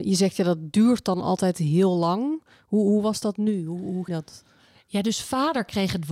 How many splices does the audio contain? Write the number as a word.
one